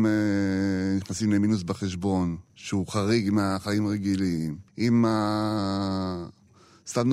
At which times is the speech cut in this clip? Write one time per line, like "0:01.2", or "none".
0:02.5
0:04.7